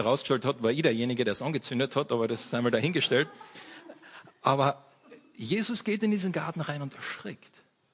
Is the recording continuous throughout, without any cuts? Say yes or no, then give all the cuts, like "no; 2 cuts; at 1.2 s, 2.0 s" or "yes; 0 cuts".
yes; 0 cuts